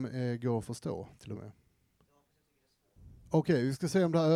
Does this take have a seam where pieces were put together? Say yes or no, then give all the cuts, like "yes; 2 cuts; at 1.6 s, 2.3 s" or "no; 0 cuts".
yes; 1 cut; at 1.4 s